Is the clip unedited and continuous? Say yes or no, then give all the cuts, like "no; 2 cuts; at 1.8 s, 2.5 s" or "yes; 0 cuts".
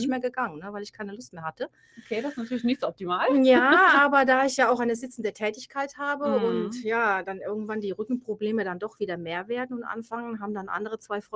yes; 0 cuts